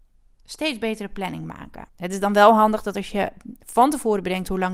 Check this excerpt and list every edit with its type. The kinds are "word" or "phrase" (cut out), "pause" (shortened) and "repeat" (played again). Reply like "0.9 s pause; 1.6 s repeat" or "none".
1.9 s pause